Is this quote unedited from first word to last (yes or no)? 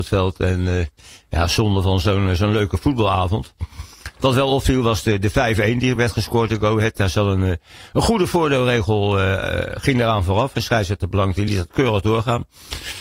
yes